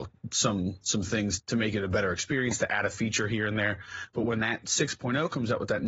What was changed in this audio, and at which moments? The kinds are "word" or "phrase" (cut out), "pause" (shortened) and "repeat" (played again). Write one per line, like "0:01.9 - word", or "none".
0:01.4 - word